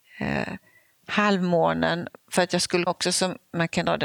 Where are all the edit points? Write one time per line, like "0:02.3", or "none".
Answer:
0:02.9